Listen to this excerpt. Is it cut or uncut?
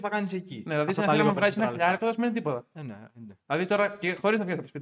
cut